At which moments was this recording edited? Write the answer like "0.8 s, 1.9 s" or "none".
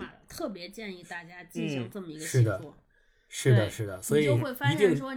none